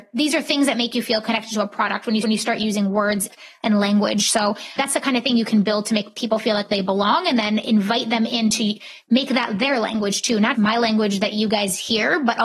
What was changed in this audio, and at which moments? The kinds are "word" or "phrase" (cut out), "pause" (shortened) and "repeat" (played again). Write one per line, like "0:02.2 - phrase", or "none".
0:02.2 - repeat
0:04.8 - word
0:10.5 - word